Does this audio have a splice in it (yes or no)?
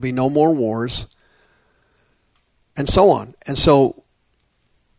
no